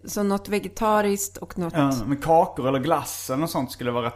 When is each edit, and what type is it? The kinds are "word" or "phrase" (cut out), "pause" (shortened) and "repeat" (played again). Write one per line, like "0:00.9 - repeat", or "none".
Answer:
none